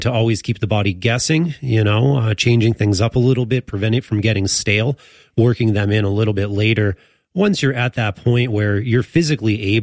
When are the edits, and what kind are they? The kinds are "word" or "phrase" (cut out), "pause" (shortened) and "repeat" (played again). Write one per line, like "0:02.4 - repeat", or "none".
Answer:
none

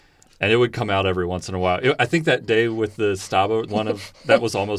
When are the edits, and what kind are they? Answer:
0:03.7 - phrase

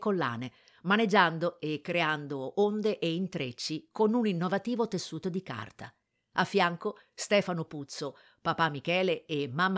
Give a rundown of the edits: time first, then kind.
none

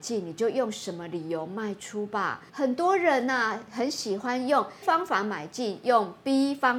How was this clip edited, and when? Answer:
0:02.5 - pause
0:04.8 - word

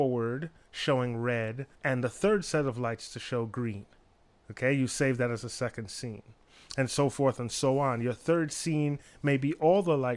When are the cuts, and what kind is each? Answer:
0:01.7 - pause
0:04.2 - pause

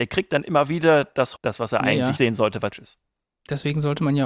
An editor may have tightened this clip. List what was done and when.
0:01.4 - word
0:02.2 - word
0:02.7 - word

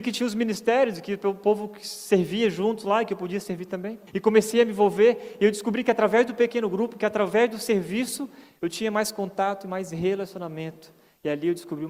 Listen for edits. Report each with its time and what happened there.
0:04.1 - pause

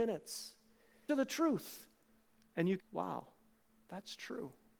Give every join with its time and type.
0:01.1 - phrase
0:02.8 - phrase

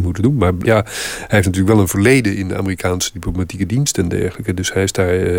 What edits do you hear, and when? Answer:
none

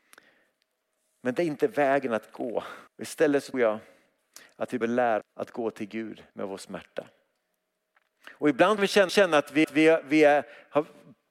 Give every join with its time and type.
0:02.9 - pause
0:03.5 - word
0:04.8 - word
0:05.2 - word
0:06.3 - pause
0:08.8 - phrase
0:09.1 - repeat
0:09.6 - repeat

